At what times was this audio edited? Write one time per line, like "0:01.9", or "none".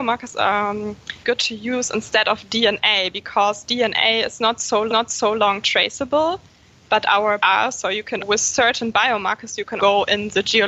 0:01.2
0:04.9
0:07.4
0:08.2
0:09.8

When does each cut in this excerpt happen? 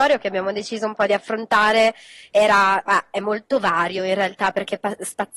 none

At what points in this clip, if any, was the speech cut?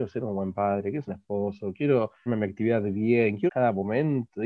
0:01.1
0:02.3
0:03.5

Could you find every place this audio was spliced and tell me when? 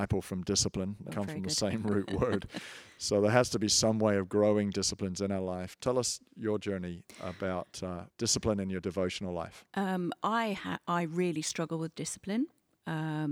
0:01.1
0:08.1

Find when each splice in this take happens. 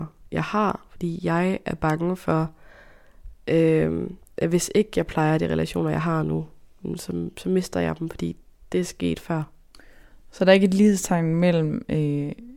none

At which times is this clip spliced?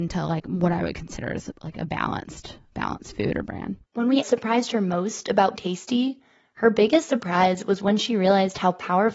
0:02.7
0:03.5
0:03.8
0:04.2
0:05.6

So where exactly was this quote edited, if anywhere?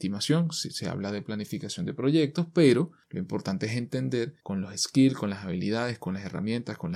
0:04.4

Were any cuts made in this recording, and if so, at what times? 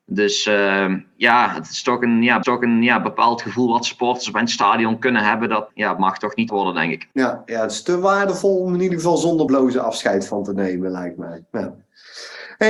0:02.4
0:05.7
0:06.5
0:07.1
0:09.5

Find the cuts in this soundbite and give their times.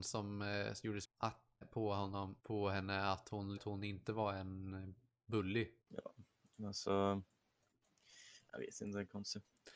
0:01.0
0:01.6
0:02.4
0:03.6
0:05.8

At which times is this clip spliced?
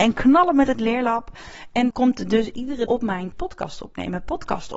0:01.9
0:02.9
0:03.3

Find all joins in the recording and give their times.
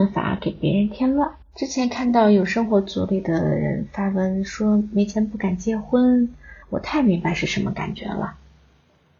0:01.4
0:06.6

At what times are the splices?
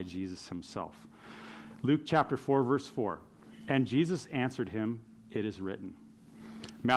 none

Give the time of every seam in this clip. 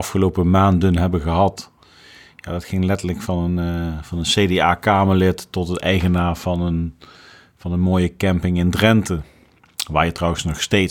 none

